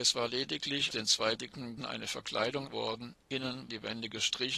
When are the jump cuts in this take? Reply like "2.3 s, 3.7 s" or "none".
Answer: 0.9 s, 1.4 s, 1.8 s, 2.7 s, 3.7 s